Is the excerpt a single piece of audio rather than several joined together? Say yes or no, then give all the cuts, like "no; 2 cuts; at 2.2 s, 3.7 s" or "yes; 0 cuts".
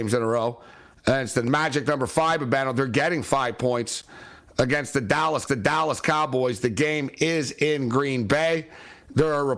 no; 1 cut; at 5.5 s